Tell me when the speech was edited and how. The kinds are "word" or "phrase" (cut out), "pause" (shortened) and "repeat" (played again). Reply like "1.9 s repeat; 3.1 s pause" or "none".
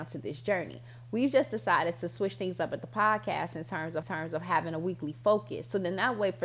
4.0 s repeat